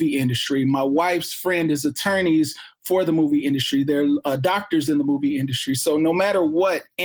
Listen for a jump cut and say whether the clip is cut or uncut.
uncut